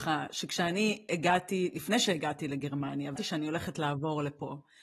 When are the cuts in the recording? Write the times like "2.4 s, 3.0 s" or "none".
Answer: 3.2 s